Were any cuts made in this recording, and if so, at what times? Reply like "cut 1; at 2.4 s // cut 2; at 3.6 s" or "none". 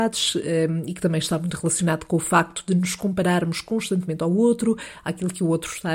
none